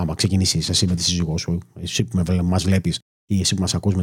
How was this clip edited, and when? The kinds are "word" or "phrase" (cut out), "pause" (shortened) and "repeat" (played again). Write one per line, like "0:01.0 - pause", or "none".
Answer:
none